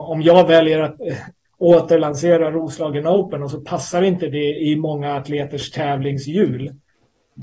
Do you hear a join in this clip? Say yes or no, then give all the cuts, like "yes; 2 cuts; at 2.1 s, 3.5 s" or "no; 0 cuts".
no; 0 cuts